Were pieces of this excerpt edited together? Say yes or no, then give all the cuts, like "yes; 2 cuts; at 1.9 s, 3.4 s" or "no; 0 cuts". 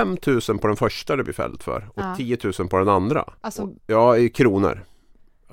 yes; 2 cuts; at 3.4 s, 3.8 s